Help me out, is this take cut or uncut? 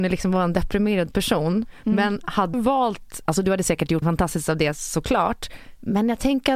cut